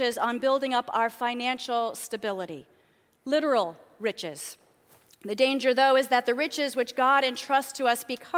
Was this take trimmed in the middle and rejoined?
no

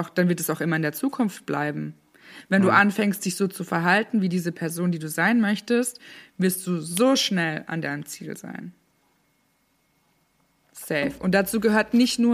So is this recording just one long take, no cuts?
yes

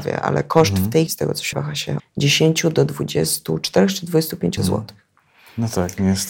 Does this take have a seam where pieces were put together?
yes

